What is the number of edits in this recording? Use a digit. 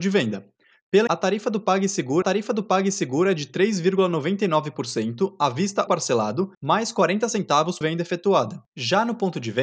6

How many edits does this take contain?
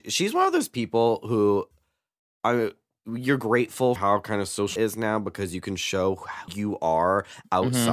3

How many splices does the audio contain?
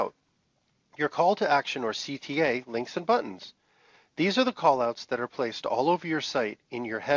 0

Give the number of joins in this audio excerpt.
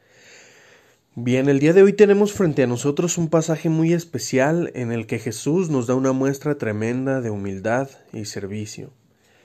0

